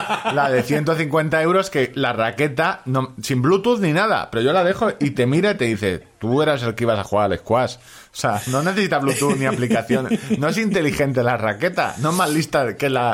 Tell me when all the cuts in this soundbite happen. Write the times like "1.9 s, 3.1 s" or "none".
none